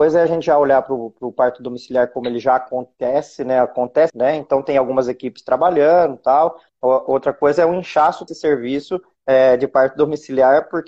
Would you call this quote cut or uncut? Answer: cut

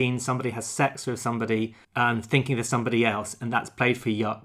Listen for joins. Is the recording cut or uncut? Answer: cut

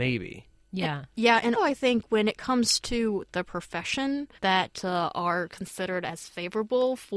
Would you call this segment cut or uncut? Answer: cut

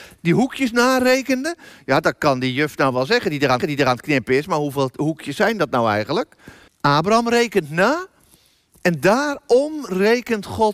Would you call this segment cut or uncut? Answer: cut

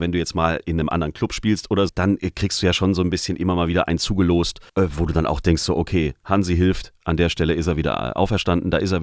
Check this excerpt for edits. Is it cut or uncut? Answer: cut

